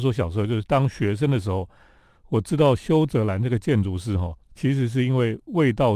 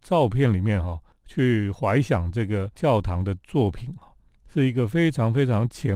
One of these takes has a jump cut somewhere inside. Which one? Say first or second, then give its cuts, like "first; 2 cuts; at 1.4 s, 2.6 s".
first; 1 cut; at 4.4 s